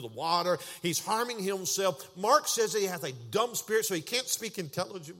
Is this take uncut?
yes; 0 cuts

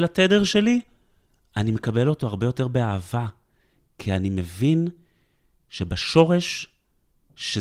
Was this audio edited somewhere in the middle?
no; 0 cuts

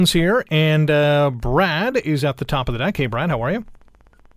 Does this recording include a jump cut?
no; 0 cuts

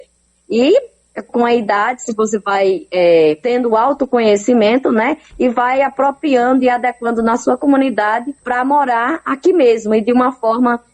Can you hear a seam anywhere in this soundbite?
yes; 2 cuts; at 1.3 s, 8.4 s

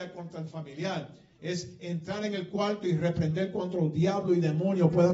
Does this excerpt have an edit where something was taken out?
no; 0 cuts

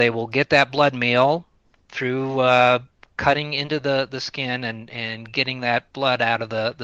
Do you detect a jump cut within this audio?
no; 0 cuts

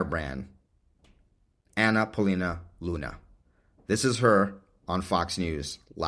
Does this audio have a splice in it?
no; 0 cuts

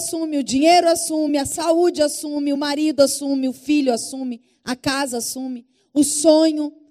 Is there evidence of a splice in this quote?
no; 0 cuts

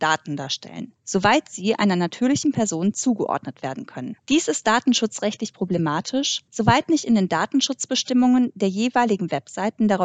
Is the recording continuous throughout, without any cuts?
no; 3 cuts; at 1.0 s, 4.2 s, 6.5 s

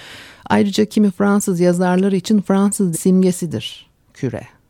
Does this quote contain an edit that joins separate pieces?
yes; 1 cut; at 2.9 s

